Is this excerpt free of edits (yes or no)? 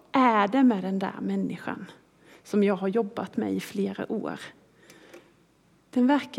yes